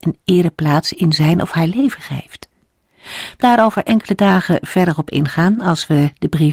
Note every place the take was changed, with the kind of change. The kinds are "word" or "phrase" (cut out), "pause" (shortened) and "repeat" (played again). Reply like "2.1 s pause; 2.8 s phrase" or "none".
3.4 s word